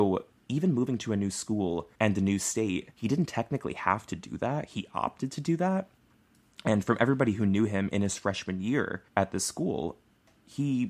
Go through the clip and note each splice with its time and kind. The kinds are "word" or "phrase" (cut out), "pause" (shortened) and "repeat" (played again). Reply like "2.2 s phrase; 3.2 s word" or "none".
1.9 s pause; 2.9 s pause; 9.1 s pause